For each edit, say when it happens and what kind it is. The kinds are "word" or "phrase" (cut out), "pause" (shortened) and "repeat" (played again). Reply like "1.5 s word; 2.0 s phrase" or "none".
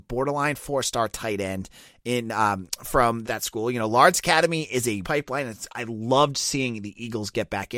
3.2 s word; 5.0 s phrase